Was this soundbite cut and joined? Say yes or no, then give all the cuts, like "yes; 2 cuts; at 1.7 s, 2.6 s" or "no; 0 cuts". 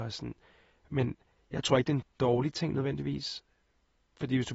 no; 0 cuts